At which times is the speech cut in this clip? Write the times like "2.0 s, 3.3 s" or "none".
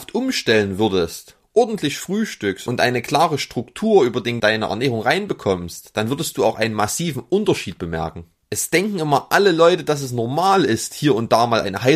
4.4 s